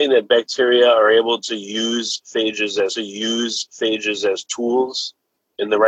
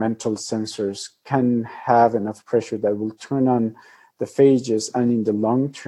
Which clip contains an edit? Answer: first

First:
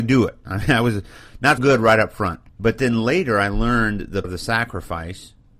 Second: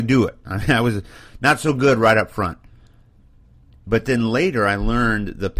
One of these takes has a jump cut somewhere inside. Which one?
first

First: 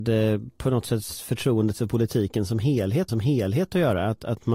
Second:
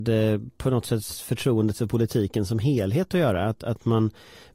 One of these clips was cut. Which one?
first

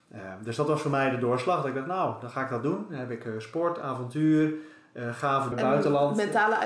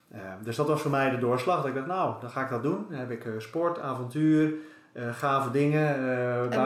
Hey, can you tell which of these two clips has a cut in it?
first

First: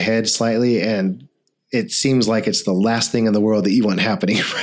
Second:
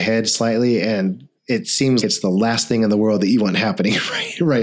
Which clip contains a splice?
second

